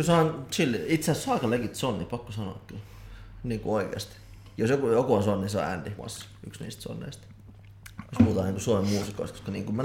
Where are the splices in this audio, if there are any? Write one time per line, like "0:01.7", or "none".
0:06.0